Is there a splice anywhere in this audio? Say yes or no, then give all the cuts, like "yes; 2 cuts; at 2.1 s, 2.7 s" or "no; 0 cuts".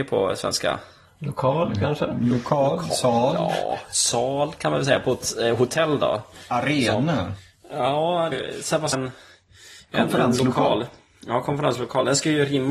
yes; 2 cuts; at 8.3 s, 8.9 s